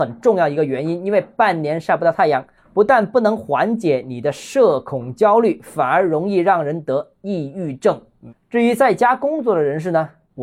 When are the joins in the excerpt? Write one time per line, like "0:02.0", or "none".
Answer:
0:02.6